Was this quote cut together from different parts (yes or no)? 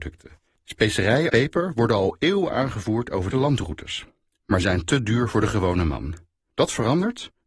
yes